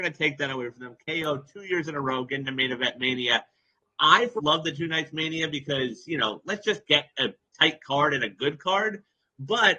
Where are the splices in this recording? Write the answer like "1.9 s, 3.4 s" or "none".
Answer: 4.4 s